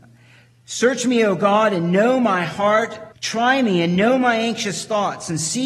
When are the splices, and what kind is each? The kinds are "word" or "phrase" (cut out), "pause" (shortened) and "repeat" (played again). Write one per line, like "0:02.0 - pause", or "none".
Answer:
0:03.1 - pause